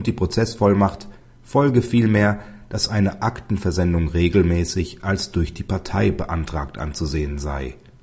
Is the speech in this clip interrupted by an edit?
no; 0 cuts

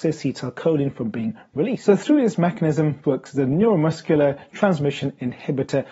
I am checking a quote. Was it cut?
yes; 1 cut; at 3.0 s

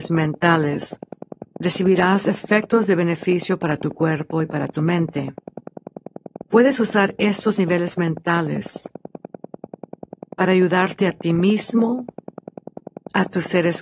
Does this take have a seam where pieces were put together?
yes; 2 cuts; at 1.5 s, 6.4 s

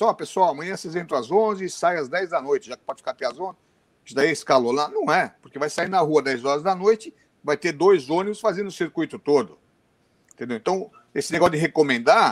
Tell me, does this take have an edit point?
no; 0 cuts

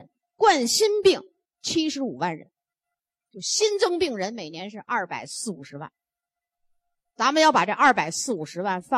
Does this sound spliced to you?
no; 0 cuts

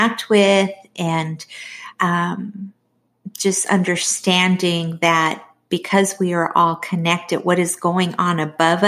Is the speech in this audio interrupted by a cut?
no; 0 cuts

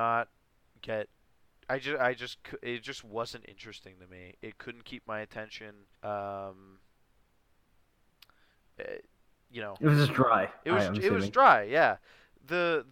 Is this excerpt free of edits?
no; 1 cut; at 5.9 s

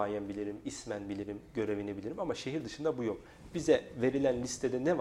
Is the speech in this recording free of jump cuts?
yes; 0 cuts

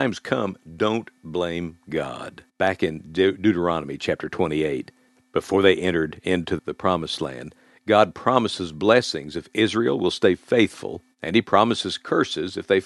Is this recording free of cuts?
no; 4 cuts; at 2.5 s, 5.1 s, 6.6 s, 11.1 s

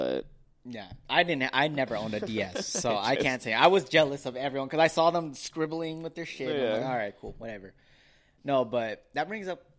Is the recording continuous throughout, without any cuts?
yes; 0 cuts

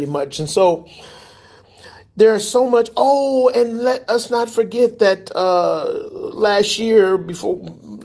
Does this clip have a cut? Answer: no; 0 cuts

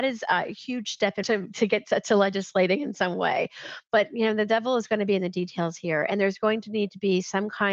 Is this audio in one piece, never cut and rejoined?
no; 1 cut; at 1.2 s

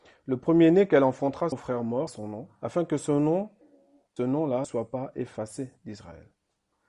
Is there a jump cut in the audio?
yes; 5 cuts; at 1.5 s, 2.1 s, 2.6 s, 4.2 s, 4.6 s

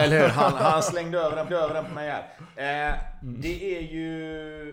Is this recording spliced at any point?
yes; 1 cut; at 1.5 s

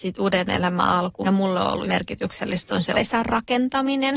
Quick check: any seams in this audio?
yes; 3 cuts; at 1.2 s, 1.8 s, 2.9 s

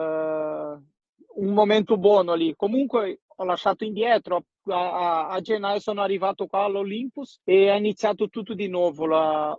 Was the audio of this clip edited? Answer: yes; 1 cut; at 7.4 s

